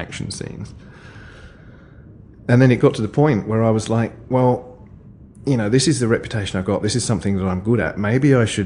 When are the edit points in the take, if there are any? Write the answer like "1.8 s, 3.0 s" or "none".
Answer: none